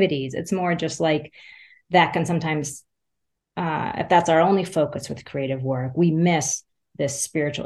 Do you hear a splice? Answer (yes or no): no